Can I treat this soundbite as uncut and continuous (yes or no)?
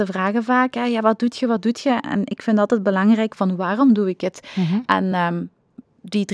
yes